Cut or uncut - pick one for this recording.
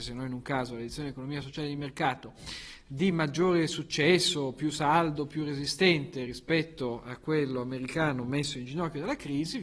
uncut